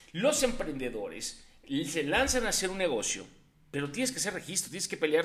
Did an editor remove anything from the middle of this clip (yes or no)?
no